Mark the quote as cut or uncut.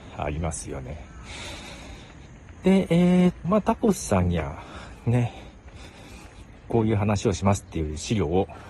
cut